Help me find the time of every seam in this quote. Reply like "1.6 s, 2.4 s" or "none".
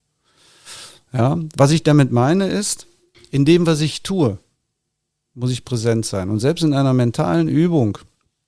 none